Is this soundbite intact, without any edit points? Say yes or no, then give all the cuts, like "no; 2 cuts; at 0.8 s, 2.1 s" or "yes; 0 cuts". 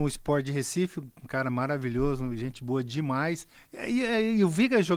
no; 1 cut; at 3.5 s